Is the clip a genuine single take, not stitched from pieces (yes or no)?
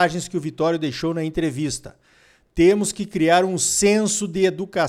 yes